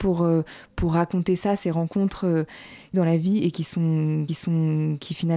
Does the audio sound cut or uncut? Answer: cut